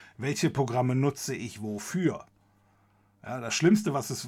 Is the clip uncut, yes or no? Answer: yes